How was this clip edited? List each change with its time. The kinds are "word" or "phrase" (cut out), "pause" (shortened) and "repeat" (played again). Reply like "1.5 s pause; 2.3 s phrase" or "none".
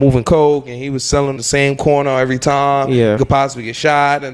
1.4 s word; 3.2 s word